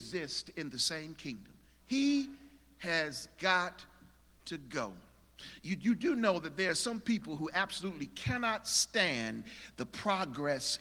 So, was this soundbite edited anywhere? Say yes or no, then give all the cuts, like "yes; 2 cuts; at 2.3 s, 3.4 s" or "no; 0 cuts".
no; 0 cuts